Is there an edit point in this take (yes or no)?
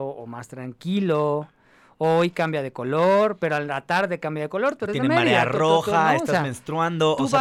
no